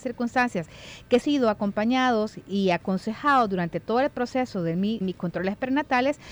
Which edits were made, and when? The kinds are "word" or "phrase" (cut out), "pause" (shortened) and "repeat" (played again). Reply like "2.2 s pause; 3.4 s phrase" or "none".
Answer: 1.2 s phrase; 5.0 s word